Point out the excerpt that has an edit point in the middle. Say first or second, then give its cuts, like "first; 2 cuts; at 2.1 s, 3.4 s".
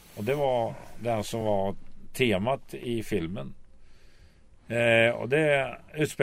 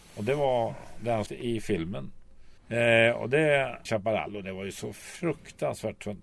second; 3 cuts; at 1.3 s, 2.6 s, 3.9 s